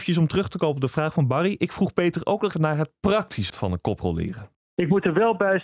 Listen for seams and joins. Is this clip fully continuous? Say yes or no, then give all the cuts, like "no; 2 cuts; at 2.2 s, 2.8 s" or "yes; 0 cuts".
no; 2 cuts; at 2.5 s, 3.5 s